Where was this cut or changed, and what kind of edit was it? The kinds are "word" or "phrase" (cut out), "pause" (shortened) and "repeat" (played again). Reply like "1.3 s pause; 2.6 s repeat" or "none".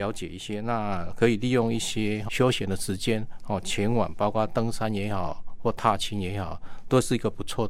2.3 s word